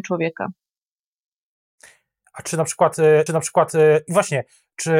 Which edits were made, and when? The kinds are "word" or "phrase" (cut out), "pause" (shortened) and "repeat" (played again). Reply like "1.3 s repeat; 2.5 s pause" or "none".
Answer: 3.3 s repeat